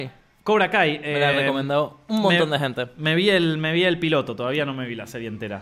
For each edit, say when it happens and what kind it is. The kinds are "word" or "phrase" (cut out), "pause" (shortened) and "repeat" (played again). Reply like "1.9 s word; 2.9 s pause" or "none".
none